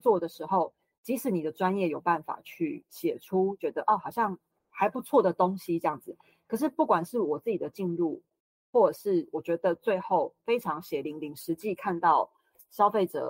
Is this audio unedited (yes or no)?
yes